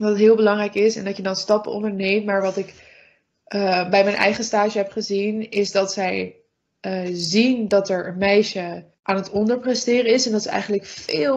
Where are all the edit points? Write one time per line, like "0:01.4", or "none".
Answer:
0:08.9